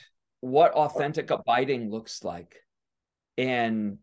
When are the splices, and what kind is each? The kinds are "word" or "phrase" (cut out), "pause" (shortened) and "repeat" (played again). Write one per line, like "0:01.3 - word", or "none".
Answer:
none